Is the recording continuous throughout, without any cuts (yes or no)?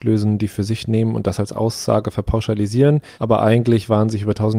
no